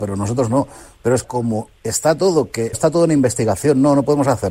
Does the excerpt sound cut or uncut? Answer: cut